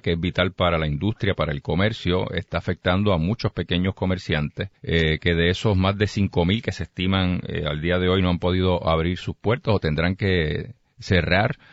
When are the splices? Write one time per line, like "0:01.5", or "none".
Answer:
0:04.8